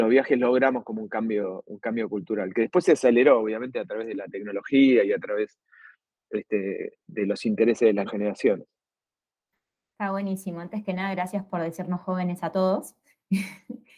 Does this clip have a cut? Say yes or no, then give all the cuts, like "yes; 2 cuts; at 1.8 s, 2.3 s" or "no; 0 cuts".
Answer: yes; 2 cuts; at 7.1 s, 8.1 s